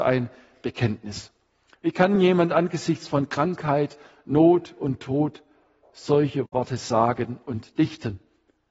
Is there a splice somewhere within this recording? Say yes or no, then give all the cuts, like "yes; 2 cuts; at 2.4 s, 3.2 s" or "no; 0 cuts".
no; 0 cuts